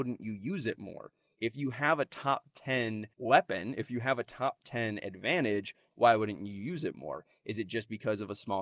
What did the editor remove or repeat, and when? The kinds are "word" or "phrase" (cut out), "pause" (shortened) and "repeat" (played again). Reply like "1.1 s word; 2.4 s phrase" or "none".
3.1 s pause